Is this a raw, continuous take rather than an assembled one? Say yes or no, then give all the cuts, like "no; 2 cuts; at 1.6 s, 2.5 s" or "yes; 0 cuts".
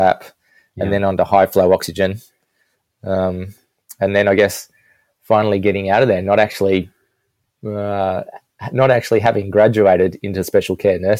yes; 0 cuts